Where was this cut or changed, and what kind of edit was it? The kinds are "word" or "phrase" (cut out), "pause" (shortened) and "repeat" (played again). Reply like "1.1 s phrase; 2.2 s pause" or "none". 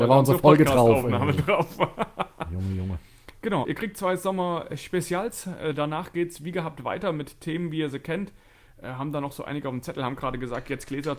3.6 s word